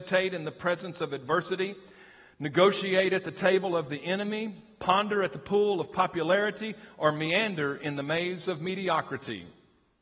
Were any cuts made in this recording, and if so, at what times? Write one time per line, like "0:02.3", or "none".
none